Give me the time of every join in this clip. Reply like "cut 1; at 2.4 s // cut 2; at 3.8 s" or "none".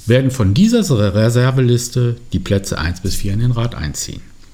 none